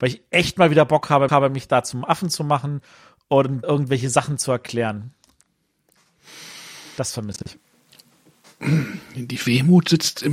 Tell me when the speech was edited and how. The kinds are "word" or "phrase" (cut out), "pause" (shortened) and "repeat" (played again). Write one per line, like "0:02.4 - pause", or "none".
0:01.3 - repeat
0:03.6 - word